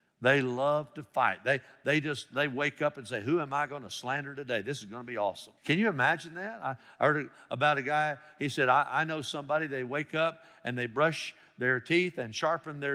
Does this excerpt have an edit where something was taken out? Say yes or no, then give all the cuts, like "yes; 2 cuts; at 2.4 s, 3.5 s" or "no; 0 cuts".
yes; 1 cut; at 5.6 s